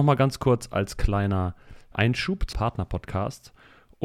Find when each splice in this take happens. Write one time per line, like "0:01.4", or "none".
0:01.9
0:02.5

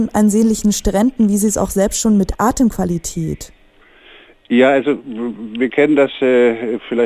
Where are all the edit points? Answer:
none

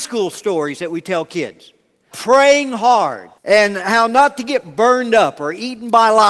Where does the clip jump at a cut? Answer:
0:02.1
0:03.4

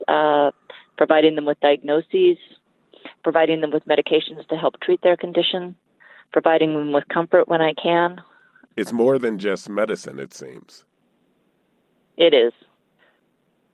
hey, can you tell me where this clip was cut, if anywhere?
none

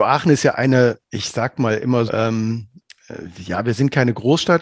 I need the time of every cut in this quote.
0:01.0
0:02.1

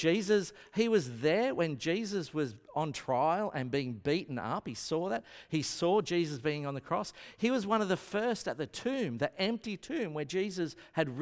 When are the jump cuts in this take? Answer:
none

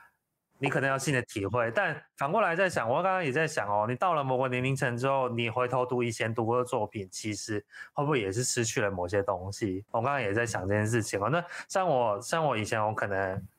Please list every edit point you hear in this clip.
0:09.9

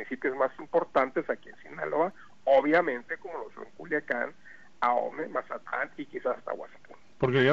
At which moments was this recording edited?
none

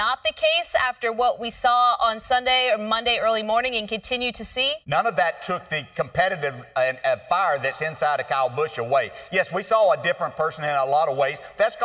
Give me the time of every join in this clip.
0:04.8

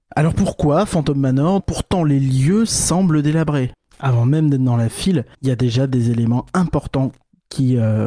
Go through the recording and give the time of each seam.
0:01.6
0:05.3

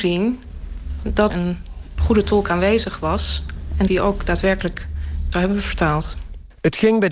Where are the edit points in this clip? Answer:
0:01.3
0:03.9

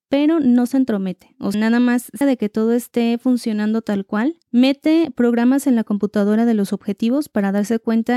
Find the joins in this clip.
0:01.5
0:02.2
0:04.4
0:05.6

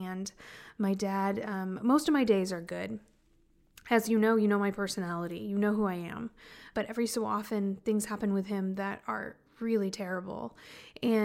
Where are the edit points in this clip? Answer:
none

